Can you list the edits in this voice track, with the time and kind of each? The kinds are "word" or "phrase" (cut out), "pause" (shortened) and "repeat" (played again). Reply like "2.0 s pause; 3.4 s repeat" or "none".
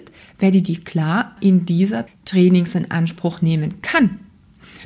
1.4 s word; 2.1 s word